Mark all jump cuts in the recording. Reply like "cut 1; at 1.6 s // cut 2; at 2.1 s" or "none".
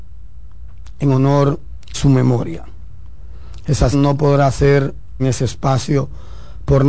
cut 1; at 1.9 s // cut 2; at 3.9 s // cut 3; at 5.2 s